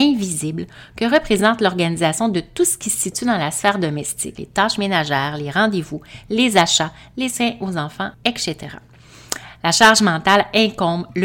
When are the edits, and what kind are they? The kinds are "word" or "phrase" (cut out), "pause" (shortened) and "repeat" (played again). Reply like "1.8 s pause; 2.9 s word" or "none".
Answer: 4.4 s word; 8.1 s pause